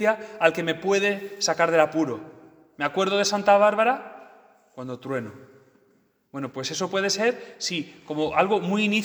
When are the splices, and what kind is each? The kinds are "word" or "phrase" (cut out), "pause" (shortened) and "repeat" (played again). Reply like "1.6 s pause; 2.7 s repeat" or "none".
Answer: none